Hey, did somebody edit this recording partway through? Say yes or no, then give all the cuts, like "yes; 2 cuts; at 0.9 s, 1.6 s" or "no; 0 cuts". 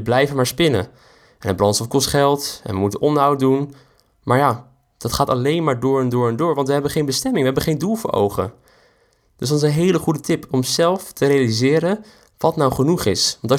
no; 0 cuts